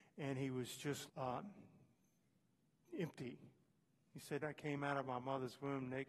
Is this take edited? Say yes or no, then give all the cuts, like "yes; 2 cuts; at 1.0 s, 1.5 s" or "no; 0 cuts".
yes; 2 cuts; at 1.1 s, 4.4 s